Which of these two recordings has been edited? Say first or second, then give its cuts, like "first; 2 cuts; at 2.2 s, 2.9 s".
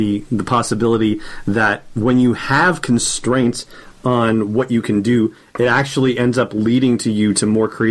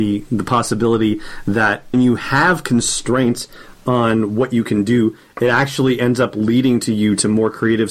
second; 1 cut; at 1.9 s